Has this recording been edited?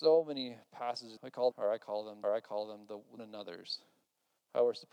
yes; 4 cuts; at 1.2 s, 1.5 s, 2.2 s, 3.2 s

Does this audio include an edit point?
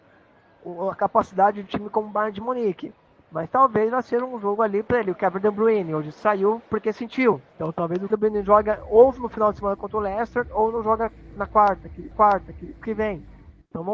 yes; 6 cuts; at 0.9 s, 1.7 s, 7.5 s, 8.1 s, 11.4 s, 12.1 s

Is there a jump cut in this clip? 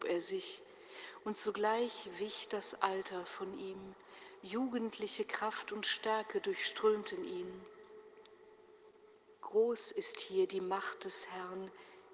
no; 0 cuts

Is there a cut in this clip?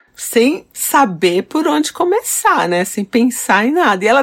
no; 0 cuts

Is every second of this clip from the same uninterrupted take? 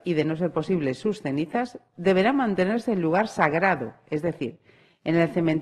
yes; 0 cuts

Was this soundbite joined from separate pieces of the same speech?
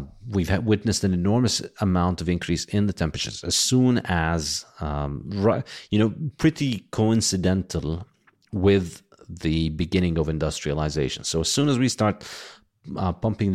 no; 0 cuts

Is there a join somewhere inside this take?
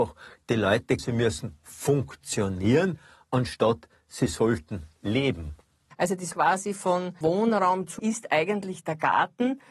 yes; 4 cuts; at 1.0 s, 6.3 s, 7.2 s, 8.0 s

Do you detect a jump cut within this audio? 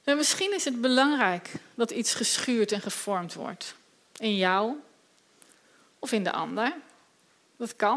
no; 0 cuts

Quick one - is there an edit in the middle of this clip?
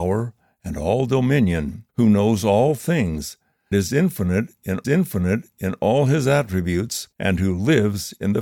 yes; 4 cuts; at 1.9 s, 3.7 s, 4.8 s, 7.1 s

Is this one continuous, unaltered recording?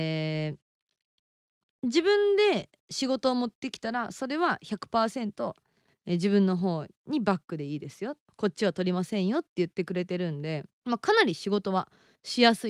no; 2 cuts; at 7.0 s, 10.7 s

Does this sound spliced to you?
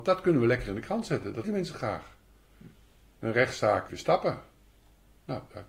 yes; 2 cuts; at 1.4 s, 3.9 s

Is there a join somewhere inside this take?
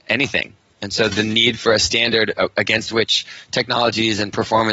no; 0 cuts

